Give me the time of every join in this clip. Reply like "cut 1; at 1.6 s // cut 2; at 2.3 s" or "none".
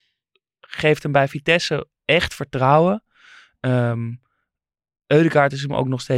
none